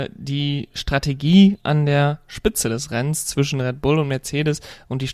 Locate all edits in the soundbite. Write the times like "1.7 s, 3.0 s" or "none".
none